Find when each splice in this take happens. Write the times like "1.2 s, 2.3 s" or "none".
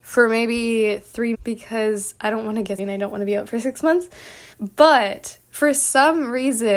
1.3 s, 2.8 s, 4.5 s